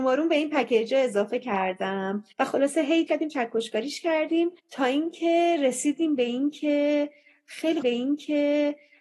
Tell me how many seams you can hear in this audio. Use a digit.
4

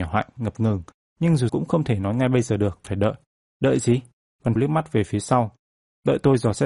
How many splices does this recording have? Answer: 3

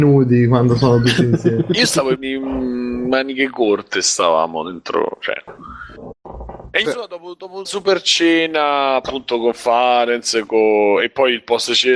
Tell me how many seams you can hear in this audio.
3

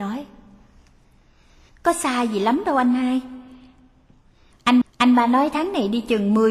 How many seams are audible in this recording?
1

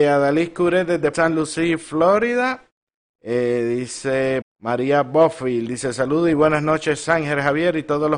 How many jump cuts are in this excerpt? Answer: 2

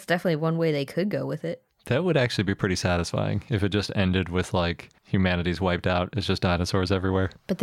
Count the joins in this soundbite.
0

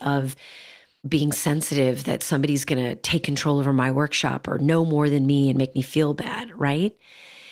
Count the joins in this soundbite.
0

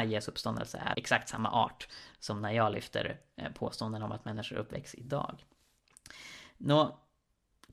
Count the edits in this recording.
1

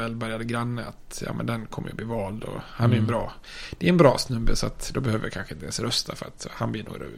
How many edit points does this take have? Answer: 0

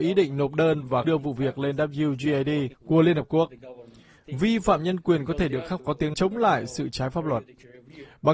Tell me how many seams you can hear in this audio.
4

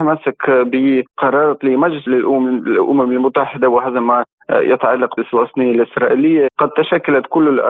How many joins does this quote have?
3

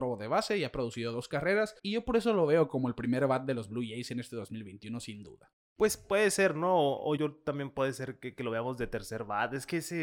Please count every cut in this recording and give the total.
2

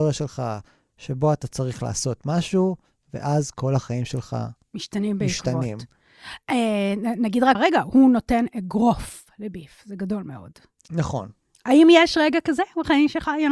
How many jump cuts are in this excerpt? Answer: 1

